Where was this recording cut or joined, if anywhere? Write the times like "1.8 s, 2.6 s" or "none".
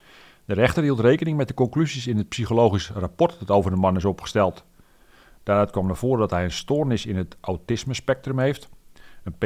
none